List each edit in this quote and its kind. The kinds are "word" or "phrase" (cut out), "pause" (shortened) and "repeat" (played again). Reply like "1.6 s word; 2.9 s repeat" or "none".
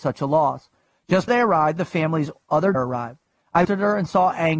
1.3 s word; 2.7 s word; 3.6 s word